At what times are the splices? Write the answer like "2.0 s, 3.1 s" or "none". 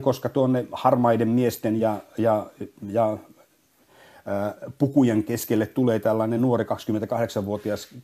none